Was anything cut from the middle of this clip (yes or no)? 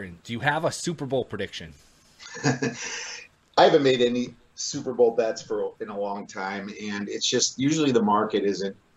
no